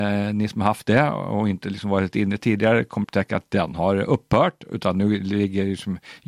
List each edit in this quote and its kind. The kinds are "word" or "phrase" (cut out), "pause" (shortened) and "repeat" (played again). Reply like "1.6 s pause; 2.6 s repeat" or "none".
3.0 s word